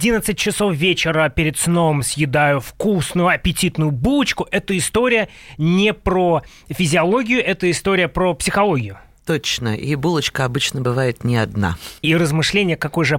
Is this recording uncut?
no; 1 cut; at 12.0 s

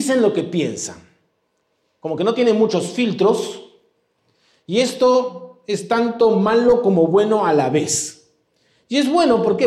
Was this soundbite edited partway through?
no; 0 cuts

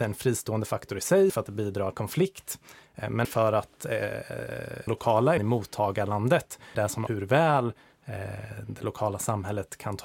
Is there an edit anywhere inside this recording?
yes; 7 cuts; at 1.3 s, 1.9 s, 3.2 s, 4.9 s, 5.4 s, 6.7 s, 7.1 s

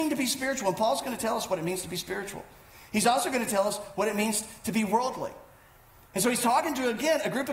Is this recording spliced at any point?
no; 0 cuts

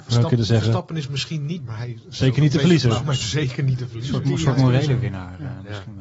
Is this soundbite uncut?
no; 1 cut; at 1.6 s

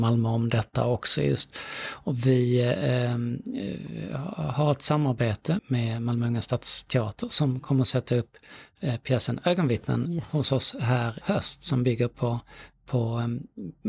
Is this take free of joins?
no; 2 cuts; at 5.6 s, 11.2 s

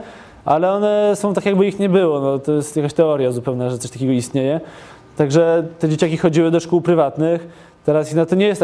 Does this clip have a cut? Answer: no; 0 cuts

